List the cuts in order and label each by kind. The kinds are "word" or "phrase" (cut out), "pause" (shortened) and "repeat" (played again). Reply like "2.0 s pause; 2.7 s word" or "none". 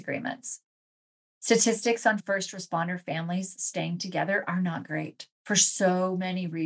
5.3 s pause